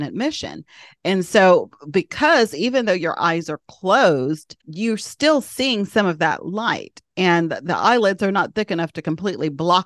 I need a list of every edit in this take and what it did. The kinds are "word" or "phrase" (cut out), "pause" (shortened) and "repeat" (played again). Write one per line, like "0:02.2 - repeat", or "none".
0:04.6 - pause